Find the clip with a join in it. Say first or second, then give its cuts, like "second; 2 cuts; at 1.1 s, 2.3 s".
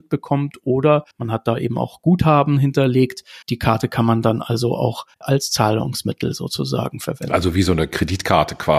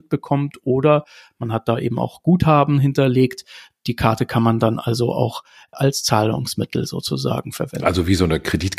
first; 3 cuts; at 1.1 s, 3.4 s, 5.1 s